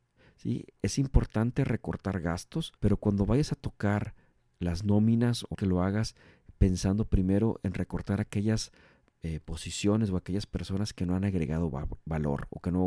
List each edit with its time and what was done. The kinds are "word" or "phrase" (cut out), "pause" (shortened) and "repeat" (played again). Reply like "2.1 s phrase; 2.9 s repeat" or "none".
2.8 s pause; 5.5 s phrase